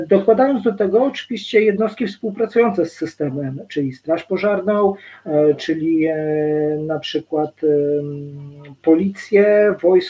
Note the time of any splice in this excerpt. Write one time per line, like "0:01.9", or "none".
none